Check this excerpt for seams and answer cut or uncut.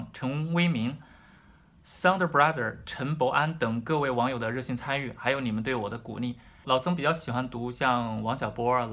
uncut